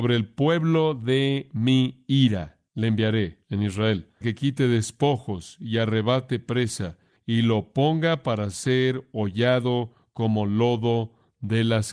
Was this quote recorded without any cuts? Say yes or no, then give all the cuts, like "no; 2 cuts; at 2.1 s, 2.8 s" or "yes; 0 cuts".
no; 3 cuts; at 2.7 s, 3.4 s, 4.2 s